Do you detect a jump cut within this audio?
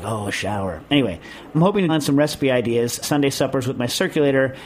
yes; 3 cuts; at 1.5 s, 1.9 s, 3.0 s

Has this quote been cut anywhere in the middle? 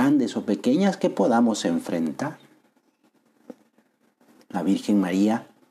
no; 0 cuts

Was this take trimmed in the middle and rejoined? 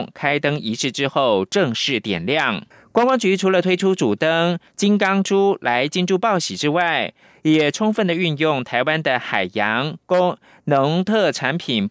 yes; 1 cut; at 2.7 s

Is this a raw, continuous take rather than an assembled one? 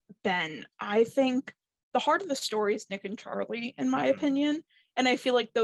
yes; 0 cuts

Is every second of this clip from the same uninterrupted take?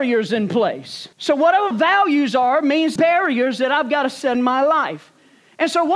no; 4 cuts; at 1.1 s, 1.7 s, 3.0 s, 4.3 s

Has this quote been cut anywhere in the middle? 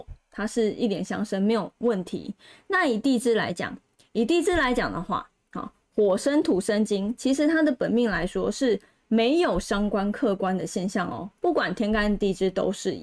no; 0 cuts

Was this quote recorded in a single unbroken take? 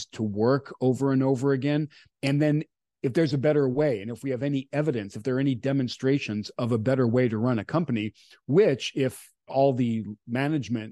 yes; 0 cuts

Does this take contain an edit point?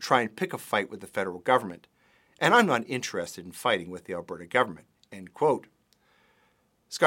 no; 0 cuts

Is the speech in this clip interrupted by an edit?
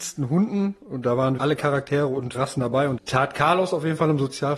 yes; 3 cuts; at 1.4 s, 2.3 s, 3.0 s

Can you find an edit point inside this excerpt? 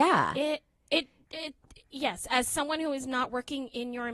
no; 0 cuts

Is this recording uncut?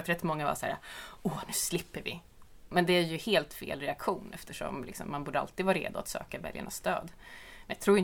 yes; 0 cuts

